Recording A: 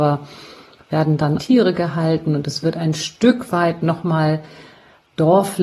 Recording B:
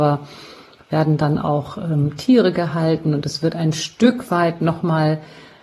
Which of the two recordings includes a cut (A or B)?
A